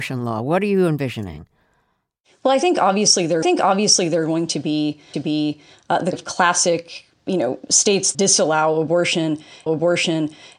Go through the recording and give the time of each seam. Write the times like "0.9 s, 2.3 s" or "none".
3.4 s, 5.1 s, 6.1 s, 7.1 s, 8.1 s, 9.7 s